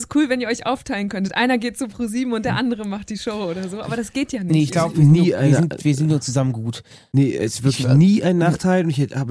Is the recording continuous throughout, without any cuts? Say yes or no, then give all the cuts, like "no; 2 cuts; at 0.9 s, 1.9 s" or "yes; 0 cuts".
yes; 0 cuts